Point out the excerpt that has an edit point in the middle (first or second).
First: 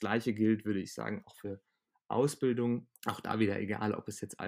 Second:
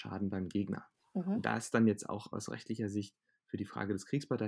first